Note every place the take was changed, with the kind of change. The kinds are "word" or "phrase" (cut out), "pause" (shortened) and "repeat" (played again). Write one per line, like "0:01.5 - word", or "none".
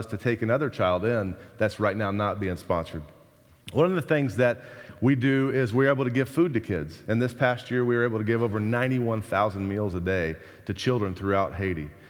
none